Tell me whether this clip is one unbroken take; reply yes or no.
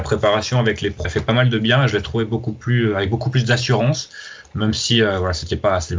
no